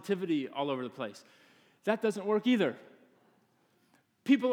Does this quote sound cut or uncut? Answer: uncut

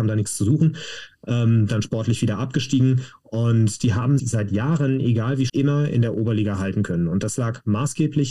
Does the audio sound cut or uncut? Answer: cut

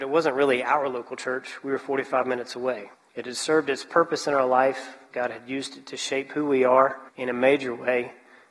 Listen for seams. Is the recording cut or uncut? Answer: cut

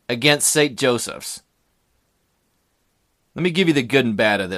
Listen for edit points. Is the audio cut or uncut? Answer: uncut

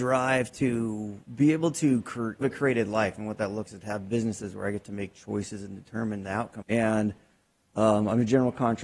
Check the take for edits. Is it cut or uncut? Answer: cut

